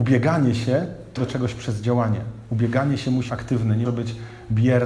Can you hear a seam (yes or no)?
yes